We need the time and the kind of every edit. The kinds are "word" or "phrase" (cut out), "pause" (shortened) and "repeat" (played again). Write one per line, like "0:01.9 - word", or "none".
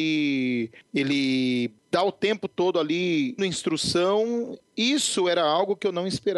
0:03.4 - word